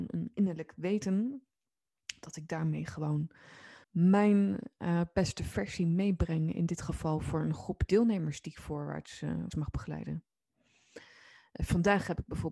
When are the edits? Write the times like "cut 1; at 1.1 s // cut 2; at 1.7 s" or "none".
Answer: cut 1; at 3.8 s // cut 2; at 9.5 s